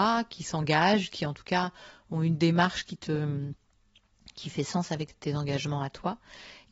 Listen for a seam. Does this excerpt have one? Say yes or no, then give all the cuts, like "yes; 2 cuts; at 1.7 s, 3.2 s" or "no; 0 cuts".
no; 0 cuts